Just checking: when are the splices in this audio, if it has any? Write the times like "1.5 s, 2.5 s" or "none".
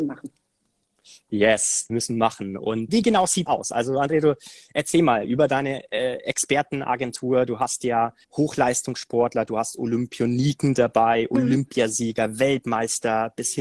1.9 s, 2.9 s, 3.5 s, 8.2 s